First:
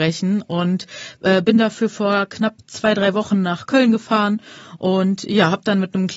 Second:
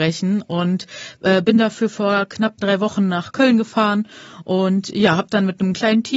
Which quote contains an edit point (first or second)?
second